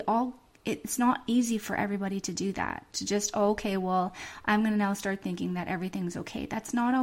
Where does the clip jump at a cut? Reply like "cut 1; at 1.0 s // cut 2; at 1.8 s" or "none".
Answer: none